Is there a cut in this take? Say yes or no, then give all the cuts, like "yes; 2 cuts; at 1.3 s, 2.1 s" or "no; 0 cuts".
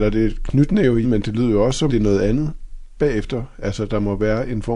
yes; 2 cuts; at 1.0 s, 1.9 s